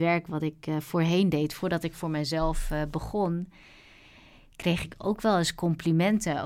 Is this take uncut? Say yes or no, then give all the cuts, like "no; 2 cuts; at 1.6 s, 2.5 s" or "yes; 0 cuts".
yes; 0 cuts